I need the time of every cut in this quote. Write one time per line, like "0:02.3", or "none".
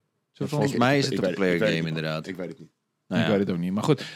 0:01.2